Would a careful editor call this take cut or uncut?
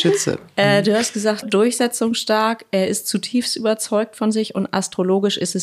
cut